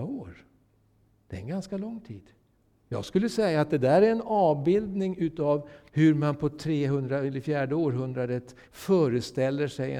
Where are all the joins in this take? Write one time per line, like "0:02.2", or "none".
0:02.6
0:05.9
0:08.6

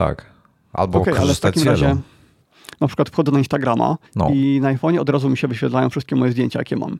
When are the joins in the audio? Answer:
0:04.1

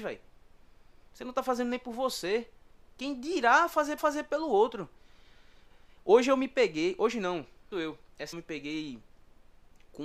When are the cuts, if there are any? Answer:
0:04.0
0:07.7
0:08.3

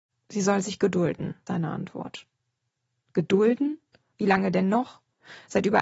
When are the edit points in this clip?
0:01.5

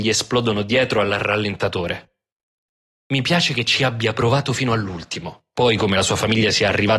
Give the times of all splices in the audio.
none

